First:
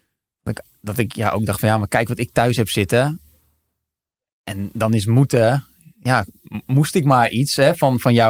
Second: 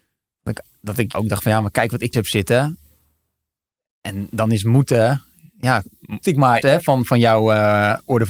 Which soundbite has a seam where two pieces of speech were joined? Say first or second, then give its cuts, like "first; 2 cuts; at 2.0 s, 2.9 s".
second; 4 cuts; at 1.1 s, 2.1 s, 6.2 s, 6.6 s